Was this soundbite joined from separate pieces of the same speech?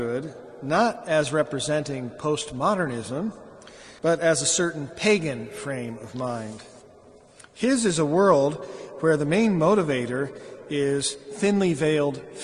yes; 1 cut; at 4.0 s

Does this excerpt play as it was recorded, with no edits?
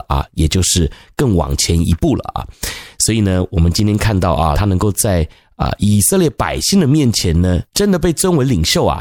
no; 1 cut; at 4.5 s

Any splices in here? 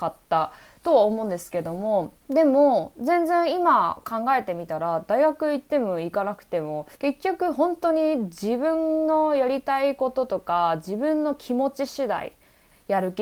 yes; 2 cuts; at 2.2 s, 6.9 s

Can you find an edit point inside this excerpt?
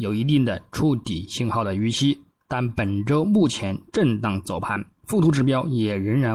no; 0 cuts

